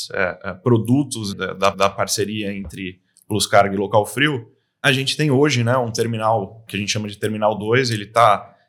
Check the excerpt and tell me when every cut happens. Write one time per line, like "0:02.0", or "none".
0:01.3
0:01.7
0:04.8
0:06.7